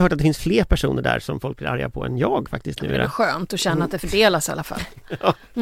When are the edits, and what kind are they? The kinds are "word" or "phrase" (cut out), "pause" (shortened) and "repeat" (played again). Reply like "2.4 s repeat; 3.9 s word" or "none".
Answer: none